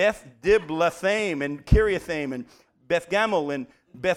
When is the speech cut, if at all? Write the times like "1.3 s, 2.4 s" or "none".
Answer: none